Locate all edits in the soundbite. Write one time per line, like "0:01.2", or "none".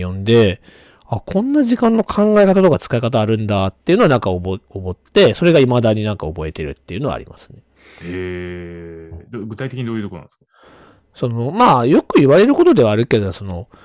none